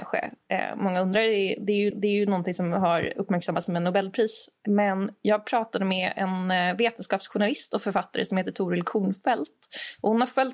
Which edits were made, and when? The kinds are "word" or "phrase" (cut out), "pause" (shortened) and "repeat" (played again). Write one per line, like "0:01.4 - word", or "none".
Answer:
0:01.9 - repeat
0:03.1 - word